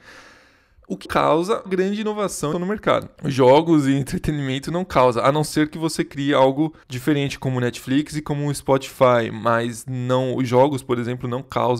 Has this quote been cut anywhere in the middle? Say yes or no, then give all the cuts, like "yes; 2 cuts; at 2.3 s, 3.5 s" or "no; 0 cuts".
yes; 4 cuts; at 1.1 s, 1.7 s, 2.5 s, 6.8 s